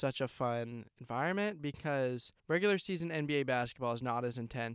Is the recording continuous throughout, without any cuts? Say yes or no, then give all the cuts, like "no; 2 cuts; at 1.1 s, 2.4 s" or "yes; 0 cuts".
no; 2 cuts; at 0.9 s, 2.4 s